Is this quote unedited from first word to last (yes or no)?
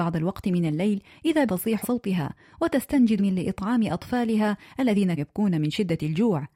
no